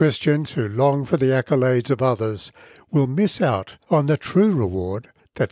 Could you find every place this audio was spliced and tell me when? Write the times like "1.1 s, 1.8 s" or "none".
none